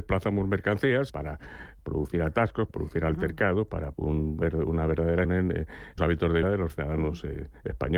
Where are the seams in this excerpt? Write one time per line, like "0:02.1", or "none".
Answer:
0:01.1
0:02.7
0:03.9
0:05.2
0:06.0
0:06.4

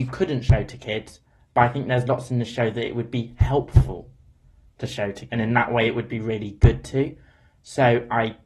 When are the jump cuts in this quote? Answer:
0:05.3

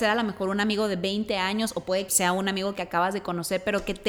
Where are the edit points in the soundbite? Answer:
0:02.1

